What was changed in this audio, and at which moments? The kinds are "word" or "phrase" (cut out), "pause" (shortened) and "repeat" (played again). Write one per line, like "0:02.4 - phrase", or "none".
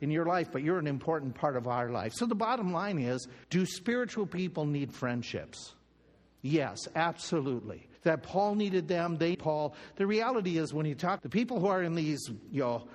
0:03.4 - pause
0:07.9 - pause
0:09.3 - word
0:11.2 - phrase